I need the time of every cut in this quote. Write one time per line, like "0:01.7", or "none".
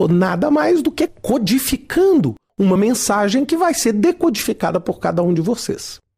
none